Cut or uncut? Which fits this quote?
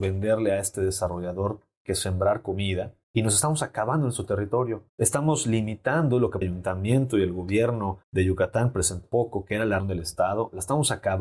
cut